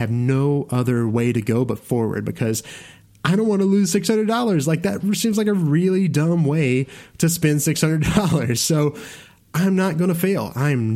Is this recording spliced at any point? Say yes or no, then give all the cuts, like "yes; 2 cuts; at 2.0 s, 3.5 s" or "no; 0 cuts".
no; 0 cuts